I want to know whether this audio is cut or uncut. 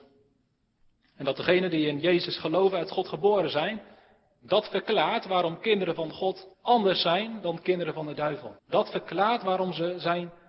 cut